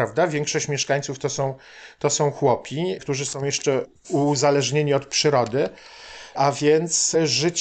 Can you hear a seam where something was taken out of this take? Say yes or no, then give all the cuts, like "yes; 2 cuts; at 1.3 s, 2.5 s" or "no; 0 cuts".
no; 0 cuts